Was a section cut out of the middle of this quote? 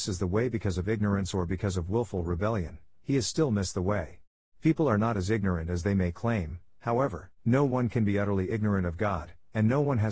yes; 2 cuts; at 4.4 s, 7.4 s

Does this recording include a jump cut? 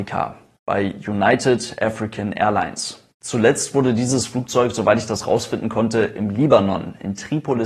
no; 0 cuts

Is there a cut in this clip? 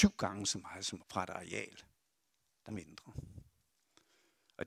yes; 2 cuts; at 1.0 s, 2.7 s

